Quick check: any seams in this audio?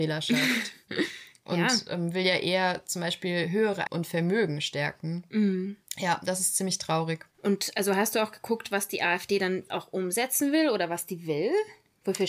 yes; 4 cuts; at 3.9 s, 5.9 s, 7.3 s, 9.7 s

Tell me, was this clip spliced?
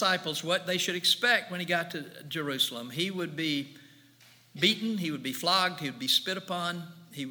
no; 0 cuts

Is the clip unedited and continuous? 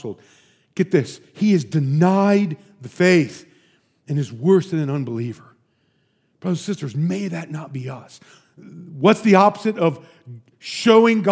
yes; 0 cuts

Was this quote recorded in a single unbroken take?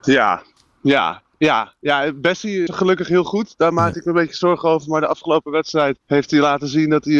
no; 2 cuts; at 2.7 s, 6.0 s

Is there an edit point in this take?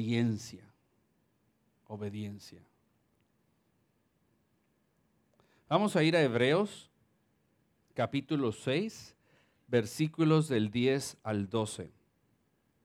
no; 0 cuts

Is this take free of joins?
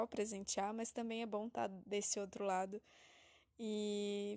yes; 0 cuts

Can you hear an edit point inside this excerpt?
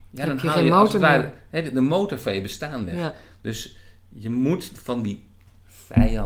no; 0 cuts

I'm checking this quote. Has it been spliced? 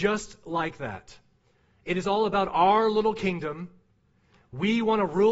no; 0 cuts

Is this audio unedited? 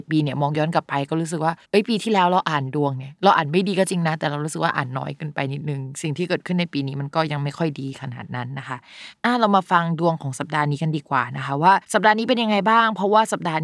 no; 2 cuts; at 1.6 s, 11.8 s

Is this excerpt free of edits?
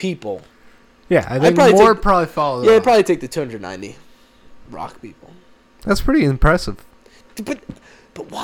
yes; 0 cuts

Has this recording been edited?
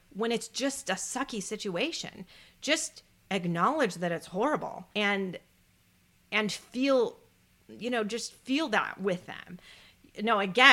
yes; 1 cut; at 4.9 s

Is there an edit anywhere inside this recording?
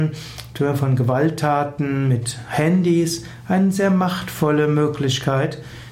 no; 0 cuts

